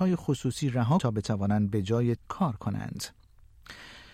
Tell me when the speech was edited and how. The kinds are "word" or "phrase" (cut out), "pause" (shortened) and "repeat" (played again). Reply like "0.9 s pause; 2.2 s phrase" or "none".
1.0 s word; 2.2 s word